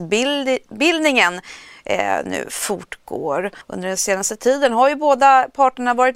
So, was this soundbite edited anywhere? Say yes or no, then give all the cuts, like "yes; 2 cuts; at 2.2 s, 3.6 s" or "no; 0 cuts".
yes; 1 cut; at 3.6 s